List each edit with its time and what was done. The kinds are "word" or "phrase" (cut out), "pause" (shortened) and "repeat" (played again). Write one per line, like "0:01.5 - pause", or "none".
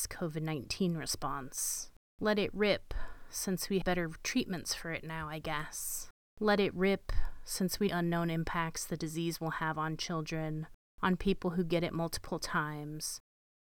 0:03.8 - word
0:07.9 - phrase

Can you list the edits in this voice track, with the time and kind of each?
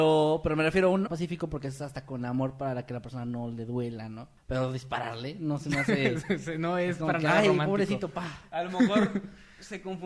0:01.1 - phrase
0:04.4 - pause

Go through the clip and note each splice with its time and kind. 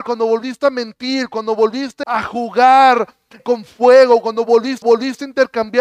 0:02.0 - word
0:03.4 - word
0:04.8 - repeat

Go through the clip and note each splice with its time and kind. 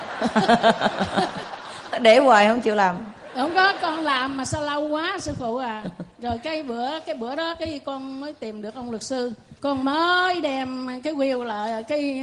0:09.6 - pause

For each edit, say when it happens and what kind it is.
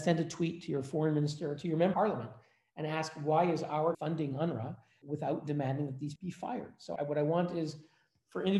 0:01.9 - word
0:03.9 - word
0:06.2 - word
0:07.0 - word

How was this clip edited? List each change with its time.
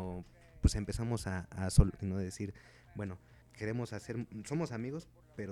0:02.0 - phrase
0:03.4 - word

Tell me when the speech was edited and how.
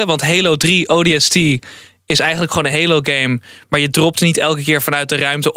none

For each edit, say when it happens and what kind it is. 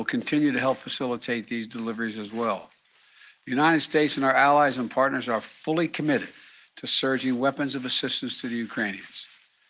none

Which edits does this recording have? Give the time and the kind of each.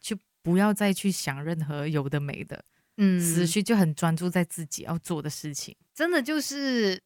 none

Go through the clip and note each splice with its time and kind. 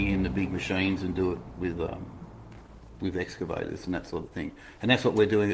none

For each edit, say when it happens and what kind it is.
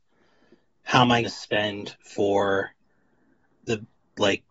0:01.2 - word

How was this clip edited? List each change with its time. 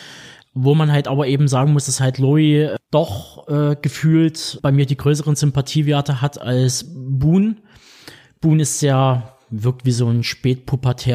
none

